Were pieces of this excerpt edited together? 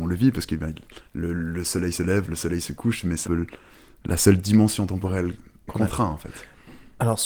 yes; 3 cuts; at 1.1 s, 3.2 s, 5.7 s

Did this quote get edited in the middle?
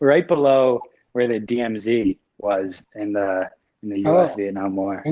no; 0 cuts

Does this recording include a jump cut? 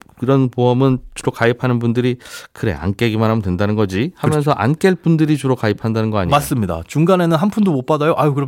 no; 0 cuts

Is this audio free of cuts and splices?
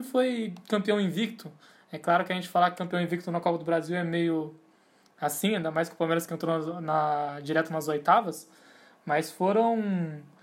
yes; 0 cuts

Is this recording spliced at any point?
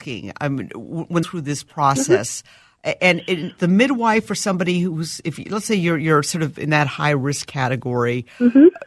yes; 2 cuts; at 1.2 s, 3.6 s

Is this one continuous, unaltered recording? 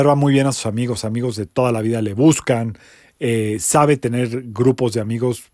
yes; 0 cuts

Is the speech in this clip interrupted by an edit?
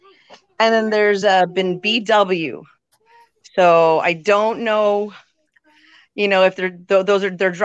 no; 0 cuts

